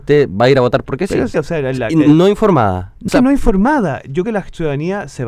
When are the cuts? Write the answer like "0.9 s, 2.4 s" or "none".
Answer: 1.3 s, 3.1 s, 4.2 s